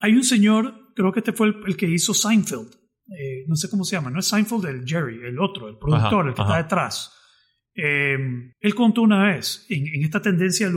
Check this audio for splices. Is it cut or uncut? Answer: cut